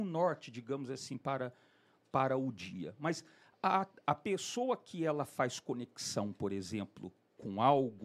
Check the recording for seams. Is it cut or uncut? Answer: uncut